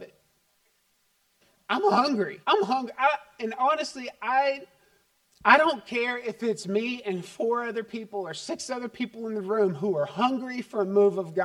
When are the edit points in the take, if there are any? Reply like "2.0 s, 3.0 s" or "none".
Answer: 2.4 s, 5.2 s